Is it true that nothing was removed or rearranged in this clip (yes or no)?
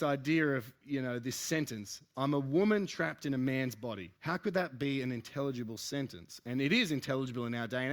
no